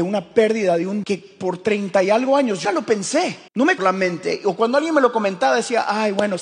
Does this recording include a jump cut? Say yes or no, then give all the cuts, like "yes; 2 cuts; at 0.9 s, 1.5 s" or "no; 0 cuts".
yes; 4 cuts; at 1.0 s, 2.6 s, 3.5 s, 3.8 s